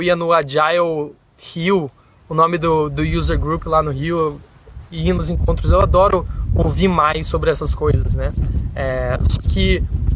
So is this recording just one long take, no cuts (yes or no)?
yes